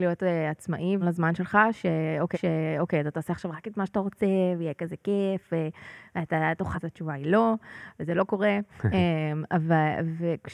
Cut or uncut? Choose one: cut